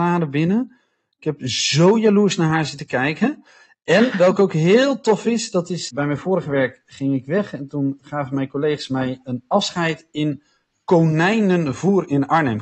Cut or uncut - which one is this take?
uncut